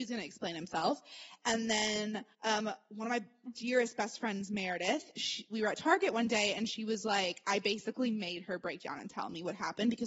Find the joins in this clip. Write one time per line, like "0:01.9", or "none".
0:02.3